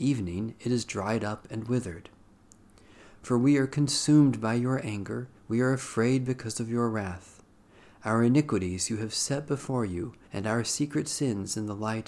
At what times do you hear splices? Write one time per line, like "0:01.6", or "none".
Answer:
0:05.4
0:10.2